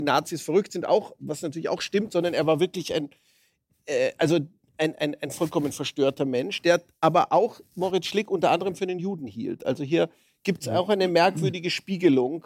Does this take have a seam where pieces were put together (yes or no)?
no